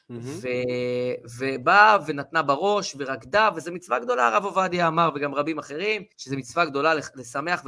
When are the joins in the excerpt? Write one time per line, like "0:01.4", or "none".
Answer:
0:06.1